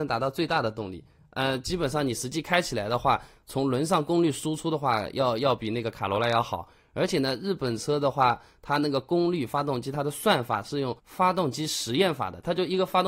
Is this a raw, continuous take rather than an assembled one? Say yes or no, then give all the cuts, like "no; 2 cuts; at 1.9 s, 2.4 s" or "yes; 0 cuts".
no; 1 cut; at 11.0 s